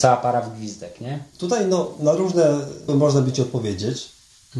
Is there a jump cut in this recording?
yes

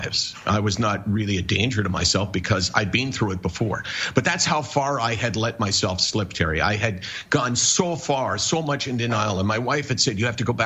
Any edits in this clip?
no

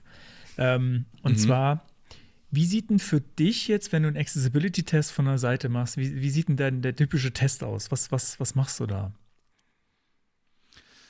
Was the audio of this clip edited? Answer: no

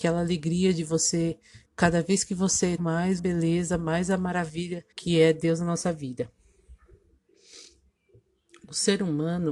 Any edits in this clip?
yes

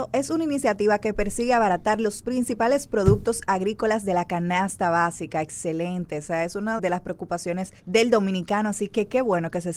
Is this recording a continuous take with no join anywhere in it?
no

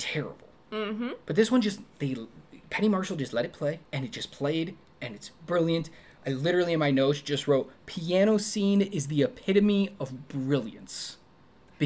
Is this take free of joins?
no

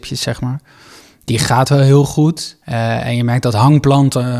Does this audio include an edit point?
yes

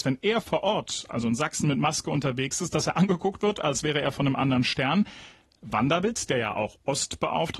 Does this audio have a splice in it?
no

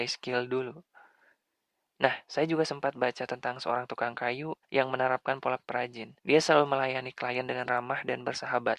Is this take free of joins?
no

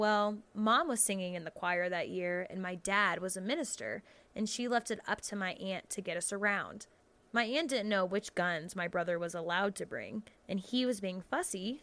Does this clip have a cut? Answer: yes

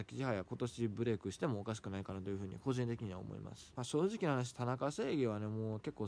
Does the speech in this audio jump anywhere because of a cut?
no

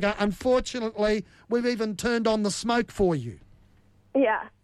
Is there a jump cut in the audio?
no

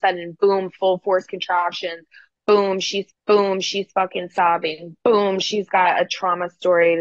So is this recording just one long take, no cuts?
no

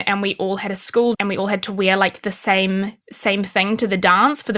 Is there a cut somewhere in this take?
yes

